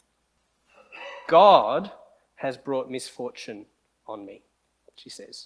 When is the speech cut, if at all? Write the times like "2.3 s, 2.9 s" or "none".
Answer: none